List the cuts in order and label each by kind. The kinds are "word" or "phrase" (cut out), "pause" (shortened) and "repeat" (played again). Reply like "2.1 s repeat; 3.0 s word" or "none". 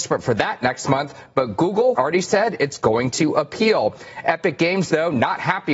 1.9 s word